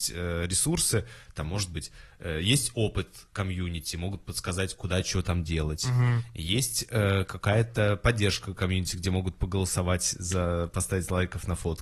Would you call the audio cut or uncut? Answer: cut